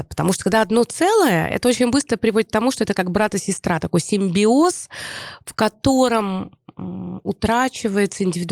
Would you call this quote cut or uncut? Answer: uncut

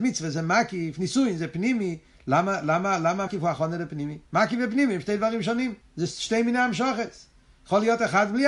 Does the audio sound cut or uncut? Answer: cut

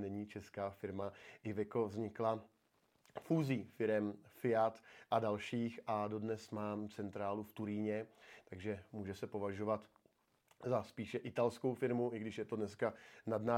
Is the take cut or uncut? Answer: uncut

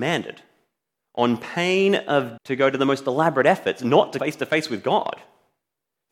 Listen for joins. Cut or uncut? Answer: cut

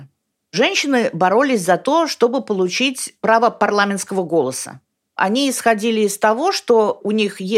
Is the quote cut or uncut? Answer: uncut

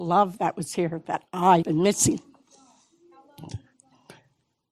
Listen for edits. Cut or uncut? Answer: cut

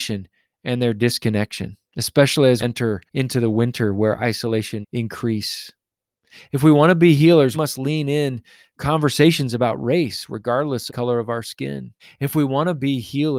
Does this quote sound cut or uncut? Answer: cut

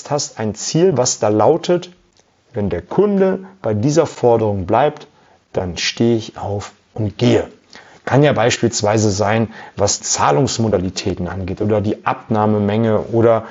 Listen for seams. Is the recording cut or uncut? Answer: cut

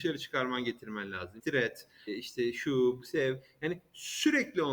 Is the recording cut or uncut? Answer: cut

